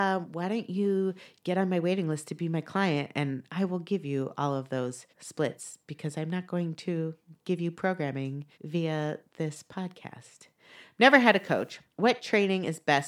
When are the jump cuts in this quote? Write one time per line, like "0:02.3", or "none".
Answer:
0:05.1
0:08.5
0:11.9